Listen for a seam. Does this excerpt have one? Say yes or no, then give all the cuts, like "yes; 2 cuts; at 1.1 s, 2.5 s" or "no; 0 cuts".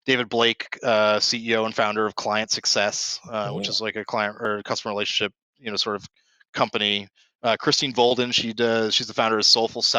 no; 0 cuts